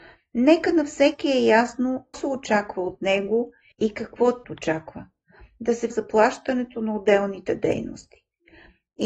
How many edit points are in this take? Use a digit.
4